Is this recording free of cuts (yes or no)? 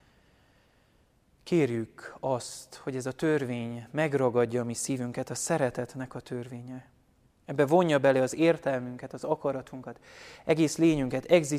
yes